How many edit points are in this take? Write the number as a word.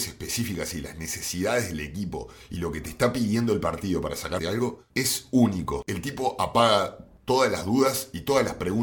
one